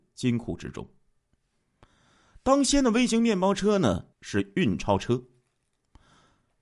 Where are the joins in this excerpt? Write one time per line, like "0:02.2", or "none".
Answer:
0:04.1